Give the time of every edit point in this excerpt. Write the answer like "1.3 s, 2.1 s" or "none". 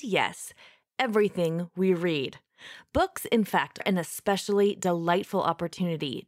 3.8 s